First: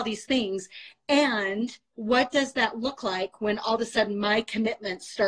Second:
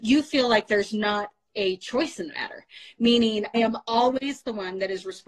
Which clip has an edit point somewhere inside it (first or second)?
second